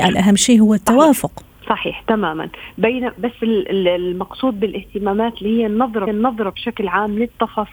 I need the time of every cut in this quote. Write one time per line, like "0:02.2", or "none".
0:01.6
0:06.1